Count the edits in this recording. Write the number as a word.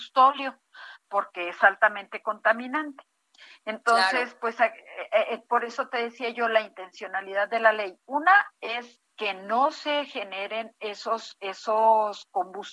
one